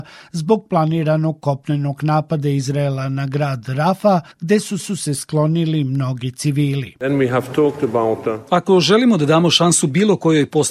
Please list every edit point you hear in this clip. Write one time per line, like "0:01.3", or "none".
0:04.3
0:04.8